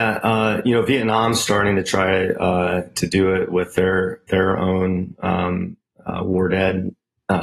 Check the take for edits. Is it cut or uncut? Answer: uncut